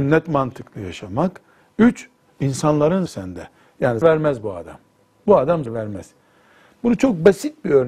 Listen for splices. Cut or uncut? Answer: cut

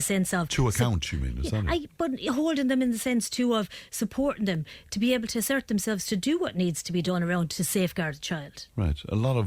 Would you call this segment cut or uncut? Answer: uncut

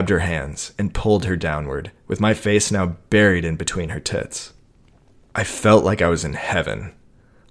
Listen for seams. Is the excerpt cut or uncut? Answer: uncut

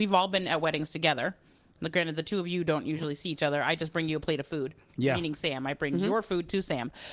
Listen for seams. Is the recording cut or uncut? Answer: uncut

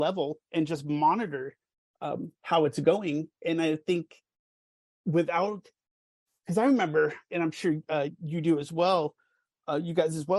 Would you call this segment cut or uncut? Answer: uncut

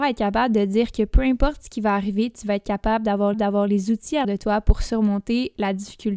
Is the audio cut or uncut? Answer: cut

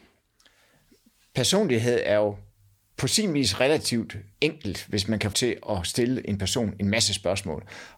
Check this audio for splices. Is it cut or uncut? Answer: cut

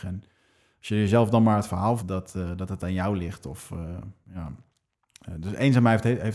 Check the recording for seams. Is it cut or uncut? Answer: cut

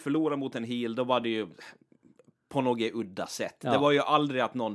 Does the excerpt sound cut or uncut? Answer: uncut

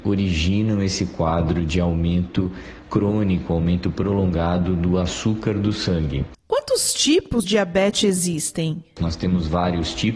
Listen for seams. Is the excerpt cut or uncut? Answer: cut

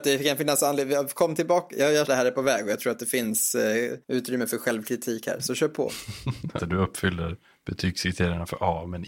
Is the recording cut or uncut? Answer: cut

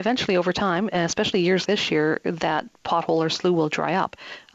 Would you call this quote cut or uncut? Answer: cut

